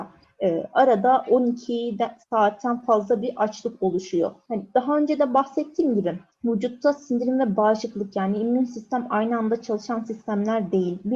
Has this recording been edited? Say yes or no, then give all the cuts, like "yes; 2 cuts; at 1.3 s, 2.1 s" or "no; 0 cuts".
no; 0 cuts